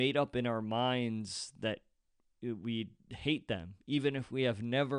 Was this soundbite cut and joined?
no; 0 cuts

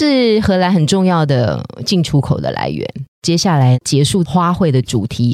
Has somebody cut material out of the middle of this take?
yes; 1 cut; at 3.1 s

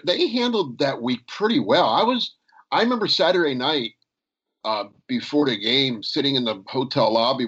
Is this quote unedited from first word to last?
yes; 0 cuts

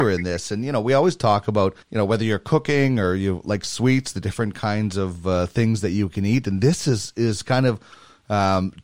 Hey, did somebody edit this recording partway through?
yes; 1 cut; at 1.8 s

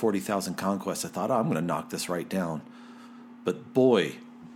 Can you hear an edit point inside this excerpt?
no; 0 cuts

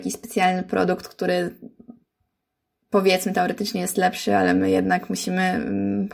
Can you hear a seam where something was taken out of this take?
no; 0 cuts

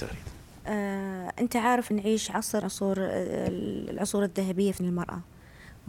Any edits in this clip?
yes; 3 cuts; at 1.9 s, 2.6 s, 4.8 s

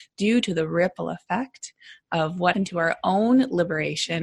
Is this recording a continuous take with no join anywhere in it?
no; 1 cut; at 2.5 s

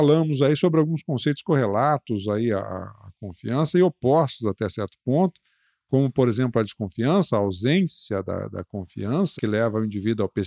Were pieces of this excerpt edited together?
yes; 1 cut; at 9.4 s

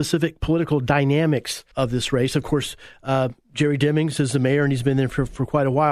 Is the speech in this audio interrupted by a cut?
yes; 1 cut; at 1.7 s

